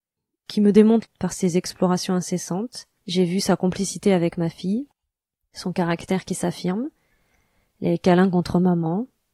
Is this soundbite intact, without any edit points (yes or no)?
no